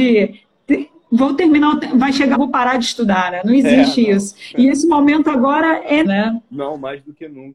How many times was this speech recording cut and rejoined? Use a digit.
2